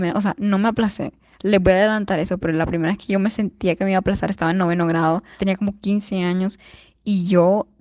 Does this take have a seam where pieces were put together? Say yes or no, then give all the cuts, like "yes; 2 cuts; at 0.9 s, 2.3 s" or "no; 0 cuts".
yes; 1 cut; at 5.4 s